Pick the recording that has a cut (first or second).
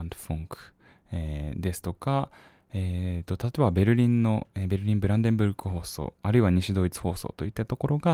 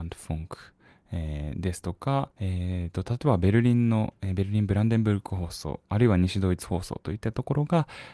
second